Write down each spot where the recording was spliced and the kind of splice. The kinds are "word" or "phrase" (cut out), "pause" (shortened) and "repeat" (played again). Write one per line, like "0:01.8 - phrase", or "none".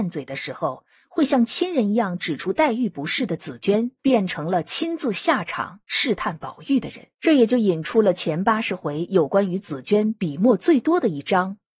0:04.0 - pause
0:07.1 - pause